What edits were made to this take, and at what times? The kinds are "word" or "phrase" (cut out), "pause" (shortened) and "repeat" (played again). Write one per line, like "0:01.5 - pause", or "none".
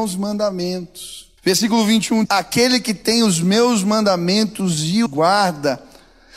0:01.4 - pause
0:02.2 - word
0:05.1 - word